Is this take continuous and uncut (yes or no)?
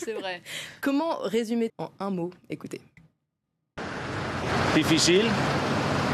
no